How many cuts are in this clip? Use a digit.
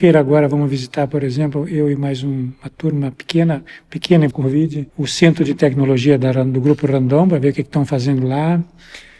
2